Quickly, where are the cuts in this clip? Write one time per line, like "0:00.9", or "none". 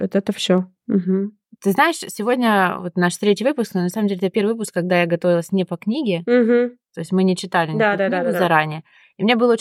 none

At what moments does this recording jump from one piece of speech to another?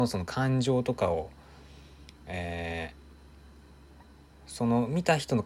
0:02.2
0:04.0

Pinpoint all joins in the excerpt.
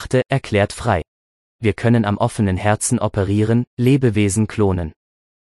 none

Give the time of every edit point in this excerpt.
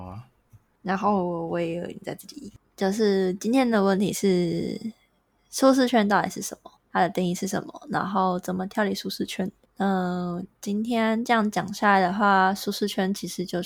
0:02.6
0:06.8
0:09.6

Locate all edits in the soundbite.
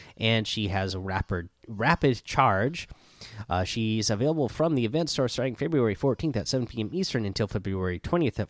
none

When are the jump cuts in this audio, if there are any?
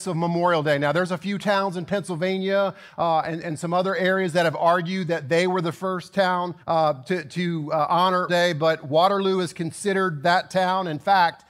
0:06.6
0:08.3

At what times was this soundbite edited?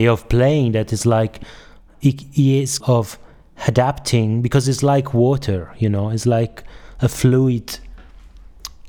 0:02.8

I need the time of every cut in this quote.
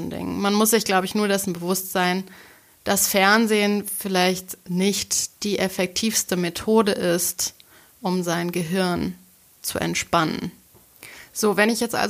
0:04.6

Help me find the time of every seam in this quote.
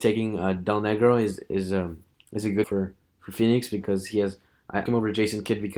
0:02.6
0:04.9

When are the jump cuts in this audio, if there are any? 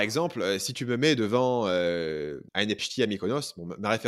0:02.5
0:02.8

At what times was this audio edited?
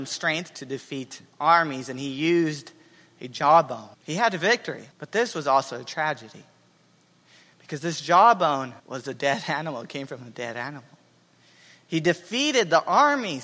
0:03.9
0:04.9
0:08.8

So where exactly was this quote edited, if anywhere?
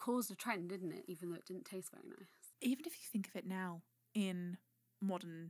0:02.5

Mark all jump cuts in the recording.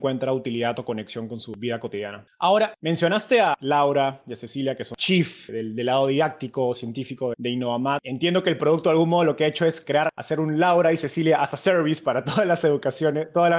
0:05.0
0:07.3

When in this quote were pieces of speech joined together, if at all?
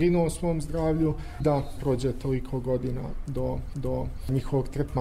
0:01.4
0:01.8
0:03.7

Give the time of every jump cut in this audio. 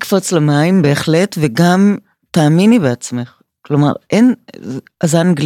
none

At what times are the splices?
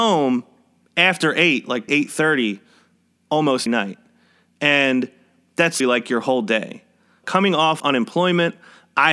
0:01.9
0:03.7
0:05.8
0:07.2
0:07.8

